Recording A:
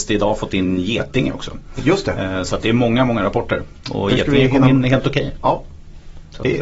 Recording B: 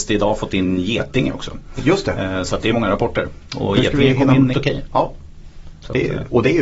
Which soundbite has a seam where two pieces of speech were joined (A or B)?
B